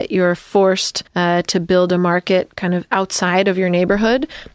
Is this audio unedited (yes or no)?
no